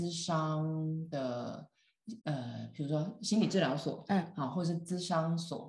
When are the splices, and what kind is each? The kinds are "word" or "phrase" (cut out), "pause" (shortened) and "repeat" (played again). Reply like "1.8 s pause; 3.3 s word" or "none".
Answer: 2.2 s pause